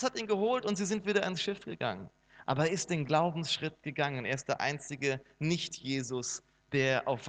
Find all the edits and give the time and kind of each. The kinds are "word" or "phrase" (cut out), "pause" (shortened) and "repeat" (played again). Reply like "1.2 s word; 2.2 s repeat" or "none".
none